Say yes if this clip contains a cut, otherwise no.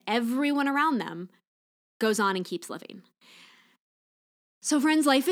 no